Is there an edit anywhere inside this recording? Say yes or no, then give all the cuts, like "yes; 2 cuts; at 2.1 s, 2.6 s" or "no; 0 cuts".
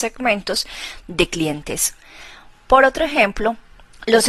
no; 0 cuts